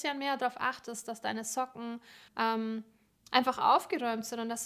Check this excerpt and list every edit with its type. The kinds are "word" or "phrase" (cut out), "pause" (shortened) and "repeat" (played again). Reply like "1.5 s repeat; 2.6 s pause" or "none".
2.3 s pause